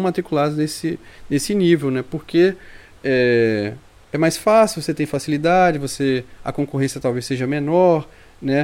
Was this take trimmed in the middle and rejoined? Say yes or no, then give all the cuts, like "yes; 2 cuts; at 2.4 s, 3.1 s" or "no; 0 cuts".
no; 0 cuts